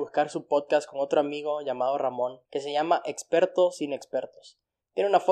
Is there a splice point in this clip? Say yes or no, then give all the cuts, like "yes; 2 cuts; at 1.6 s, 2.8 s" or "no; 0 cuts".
yes; 1 cut; at 2.4 s